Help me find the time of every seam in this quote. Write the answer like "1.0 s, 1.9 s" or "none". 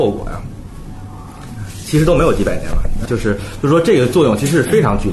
3.1 s